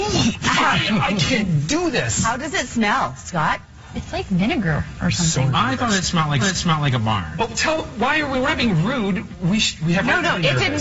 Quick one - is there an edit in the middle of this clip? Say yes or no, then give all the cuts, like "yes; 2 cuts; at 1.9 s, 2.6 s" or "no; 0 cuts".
yes; 1 cut; at 6.4 s